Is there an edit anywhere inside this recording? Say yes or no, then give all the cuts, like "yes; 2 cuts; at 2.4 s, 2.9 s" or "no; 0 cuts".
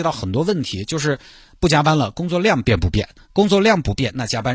no; 0 cuts